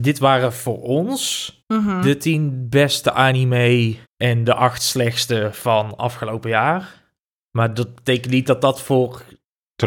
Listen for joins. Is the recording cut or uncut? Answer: cut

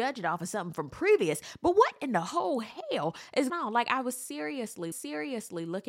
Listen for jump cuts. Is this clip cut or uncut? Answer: cut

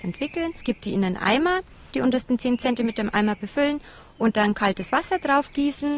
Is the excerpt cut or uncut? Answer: uncut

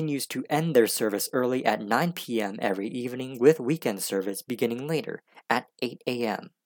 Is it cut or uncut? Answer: uncut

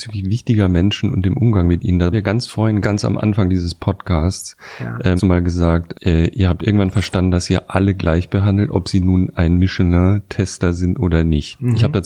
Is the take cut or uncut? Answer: cut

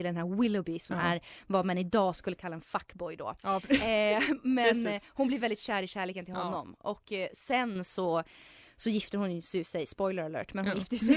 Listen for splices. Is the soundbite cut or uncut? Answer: uncut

